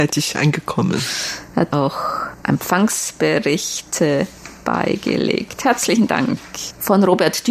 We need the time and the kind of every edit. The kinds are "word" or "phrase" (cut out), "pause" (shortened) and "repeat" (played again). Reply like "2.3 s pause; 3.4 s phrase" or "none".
1.7 s word